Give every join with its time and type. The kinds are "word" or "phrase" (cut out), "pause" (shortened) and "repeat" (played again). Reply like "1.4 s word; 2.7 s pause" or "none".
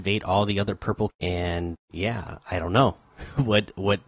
1.1 s word; 1.7 s word

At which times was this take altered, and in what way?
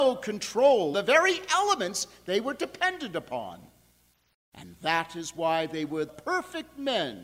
0.9 s word; 6.1 s word

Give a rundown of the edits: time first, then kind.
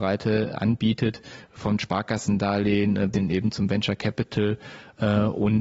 3.1 s word

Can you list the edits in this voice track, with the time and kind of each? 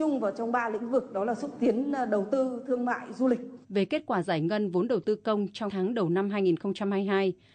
3.6 s pause; 5.7 s word

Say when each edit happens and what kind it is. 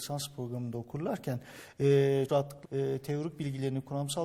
2.3 s word; 2.6 s word

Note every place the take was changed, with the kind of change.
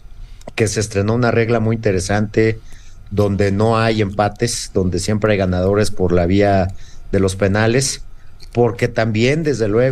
none

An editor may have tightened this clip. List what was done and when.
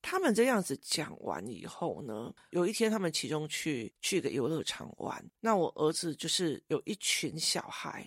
4.0 s pause; 5.3 s pause

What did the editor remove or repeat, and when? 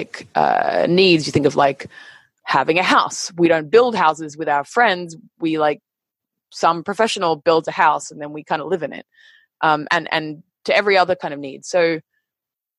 none

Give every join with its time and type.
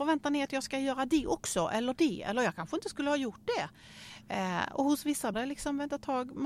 5.3 s word

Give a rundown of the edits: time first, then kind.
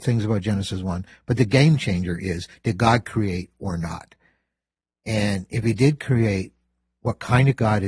none

